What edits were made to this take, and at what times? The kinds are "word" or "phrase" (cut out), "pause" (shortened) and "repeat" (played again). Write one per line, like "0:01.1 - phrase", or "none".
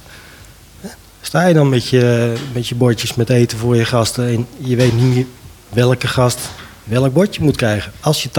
none